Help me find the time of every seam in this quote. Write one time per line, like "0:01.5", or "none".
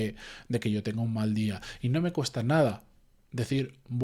none